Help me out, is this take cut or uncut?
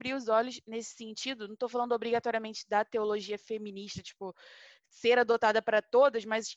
uncut